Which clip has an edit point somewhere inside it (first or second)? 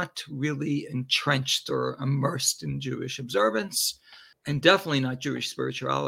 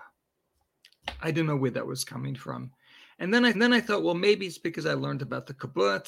second